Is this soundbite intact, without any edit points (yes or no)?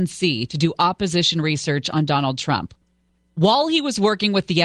yes